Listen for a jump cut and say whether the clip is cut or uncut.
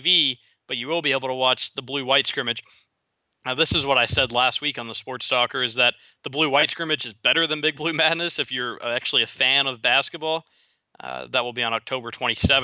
uncut